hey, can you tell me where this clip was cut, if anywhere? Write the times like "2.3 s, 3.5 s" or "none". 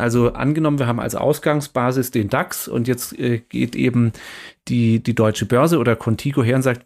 none

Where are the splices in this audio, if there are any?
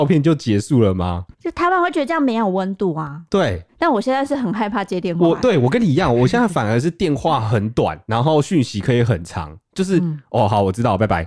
1.3 s, 3.7 s

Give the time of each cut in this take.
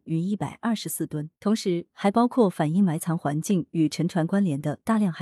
1.4 s

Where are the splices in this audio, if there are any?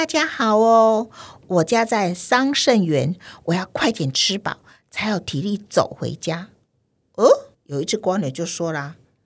7.5 s

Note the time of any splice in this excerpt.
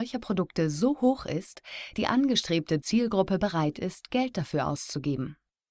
1.9 s

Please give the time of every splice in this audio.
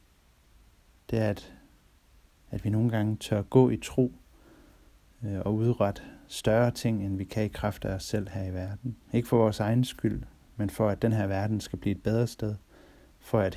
9.0 s

